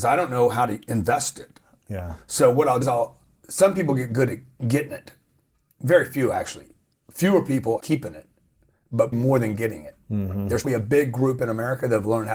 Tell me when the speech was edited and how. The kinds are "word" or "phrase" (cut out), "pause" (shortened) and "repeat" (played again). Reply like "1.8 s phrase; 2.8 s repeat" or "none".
2.8 s word; 7.8 s word; 9.1 s word; 10.6 s word